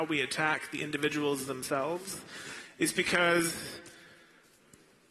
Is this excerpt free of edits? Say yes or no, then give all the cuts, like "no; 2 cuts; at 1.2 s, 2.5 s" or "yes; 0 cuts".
yes; 0 cuts